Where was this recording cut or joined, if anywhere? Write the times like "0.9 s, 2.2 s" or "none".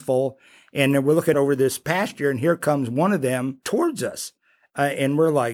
1.3 s

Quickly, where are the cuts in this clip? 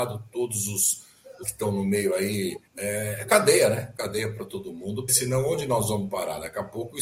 1.4 s, 2.7 s, 5.1 s

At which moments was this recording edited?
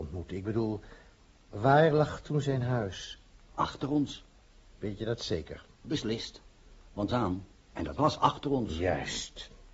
7.1 s

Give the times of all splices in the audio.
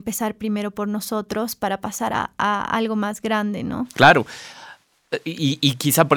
none

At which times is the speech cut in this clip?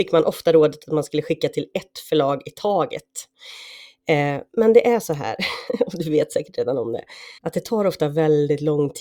7.4 s

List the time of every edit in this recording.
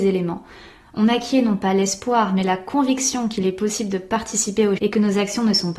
4.8 s

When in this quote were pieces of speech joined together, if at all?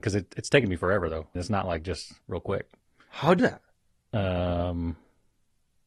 1.4 s, 2.2 s, 3.4 s

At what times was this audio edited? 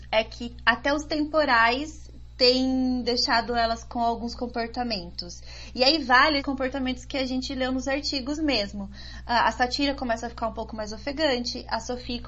6.4 s

